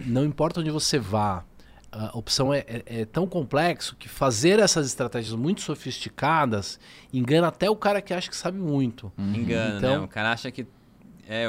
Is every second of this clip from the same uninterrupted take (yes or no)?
yes